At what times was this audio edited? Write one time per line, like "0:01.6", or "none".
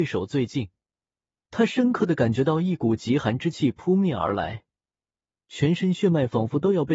none